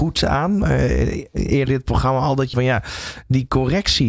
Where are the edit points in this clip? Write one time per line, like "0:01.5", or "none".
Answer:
0:01.7
0:02.5

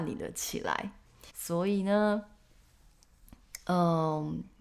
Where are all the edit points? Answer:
0:01.3

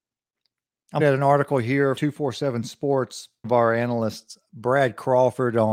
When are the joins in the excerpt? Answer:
0:01.0
0:02.0
0:03.4

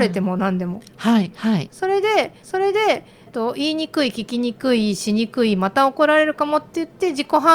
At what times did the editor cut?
0:02.4

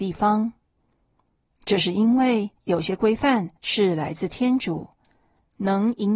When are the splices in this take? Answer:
0:02.6
0:03.6

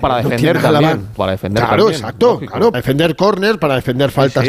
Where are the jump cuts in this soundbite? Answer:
0:01.2
0:02.7

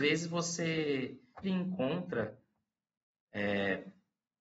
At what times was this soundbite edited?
0:01.4

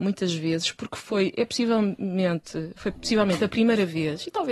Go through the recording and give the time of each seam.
none

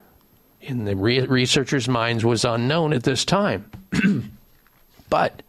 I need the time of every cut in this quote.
none

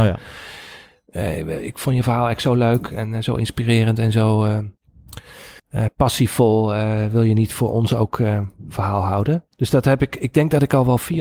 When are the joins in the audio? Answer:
0:05.6
0:09.5

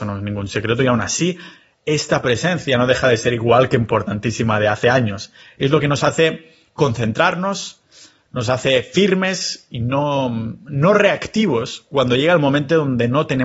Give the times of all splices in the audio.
none

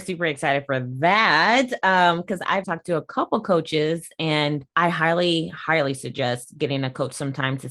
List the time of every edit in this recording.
0:02.6

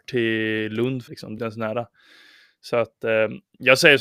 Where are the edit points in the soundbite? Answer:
0:01.1
0:01.4

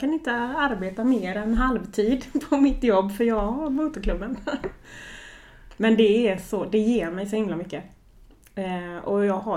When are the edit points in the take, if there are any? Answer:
none

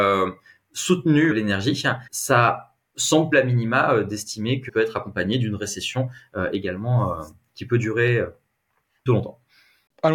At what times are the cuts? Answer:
0:01.3
0:02.1
0:03.3
0:04.7
0:09.1

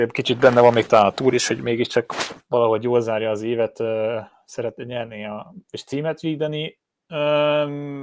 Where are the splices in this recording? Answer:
none

